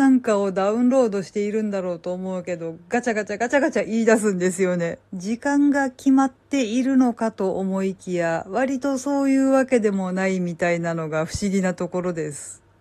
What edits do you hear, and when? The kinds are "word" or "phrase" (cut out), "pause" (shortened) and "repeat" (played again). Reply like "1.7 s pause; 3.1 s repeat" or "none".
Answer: 5.1 s pause